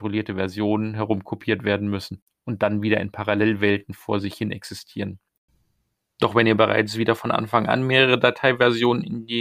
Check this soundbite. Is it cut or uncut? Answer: uncut